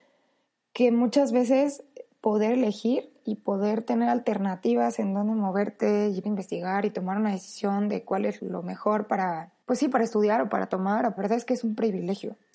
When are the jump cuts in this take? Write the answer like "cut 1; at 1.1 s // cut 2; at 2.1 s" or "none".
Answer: cut 1; at 6.2 s // cut 2; at 8.4 s // cut 3; at 9.6 s // cut 4; at 11.2 s